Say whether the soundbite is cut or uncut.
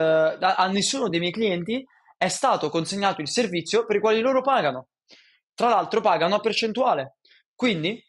uncut